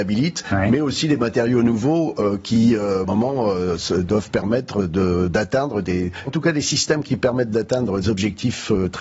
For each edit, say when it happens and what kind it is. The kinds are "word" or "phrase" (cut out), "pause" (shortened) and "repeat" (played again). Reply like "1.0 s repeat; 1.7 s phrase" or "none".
3.0 s phrase; 6.3 s word; 8.0 s word